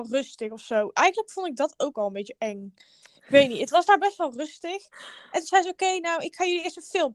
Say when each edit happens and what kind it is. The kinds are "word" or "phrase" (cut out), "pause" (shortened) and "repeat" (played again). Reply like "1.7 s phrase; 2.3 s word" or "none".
none